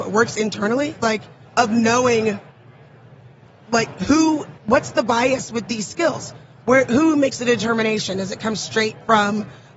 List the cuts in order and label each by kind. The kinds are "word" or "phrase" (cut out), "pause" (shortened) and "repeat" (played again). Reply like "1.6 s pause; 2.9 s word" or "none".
1.4 s pause; 3.5 s pause; 4.6 s pause